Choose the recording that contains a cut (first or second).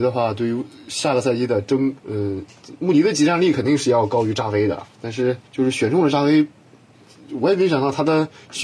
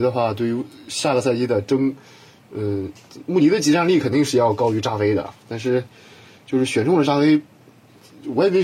first